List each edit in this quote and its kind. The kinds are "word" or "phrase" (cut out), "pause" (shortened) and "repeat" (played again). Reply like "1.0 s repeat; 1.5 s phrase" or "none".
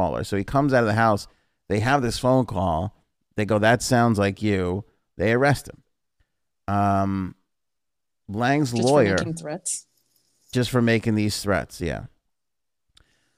none